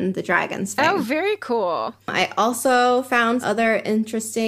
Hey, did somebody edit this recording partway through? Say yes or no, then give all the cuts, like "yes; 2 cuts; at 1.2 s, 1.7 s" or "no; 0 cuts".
yes; 2 cuts; at 2.0 s, 3.4 s